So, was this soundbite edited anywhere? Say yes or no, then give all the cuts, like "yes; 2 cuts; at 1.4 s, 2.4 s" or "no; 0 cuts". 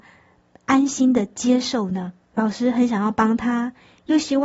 yes; 1 cut; at 2.2 s